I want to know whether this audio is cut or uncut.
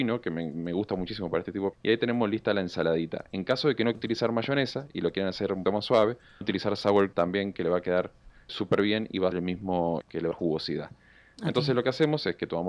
cut